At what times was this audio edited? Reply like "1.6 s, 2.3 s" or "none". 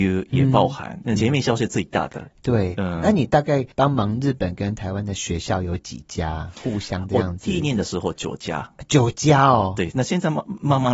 1.2 s, 3.7 s